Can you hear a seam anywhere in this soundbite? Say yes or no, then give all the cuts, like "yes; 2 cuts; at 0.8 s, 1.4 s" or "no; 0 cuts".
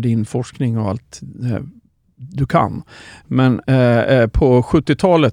no; 0 cuts